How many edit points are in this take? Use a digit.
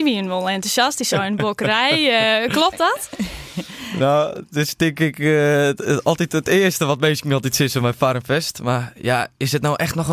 0